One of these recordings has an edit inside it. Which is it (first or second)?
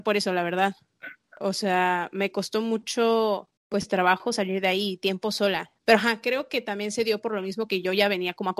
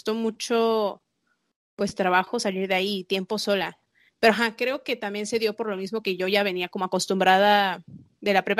first